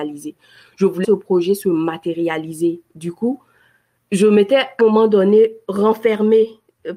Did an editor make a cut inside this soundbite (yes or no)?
yes